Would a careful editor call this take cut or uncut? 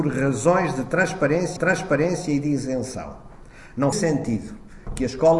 cut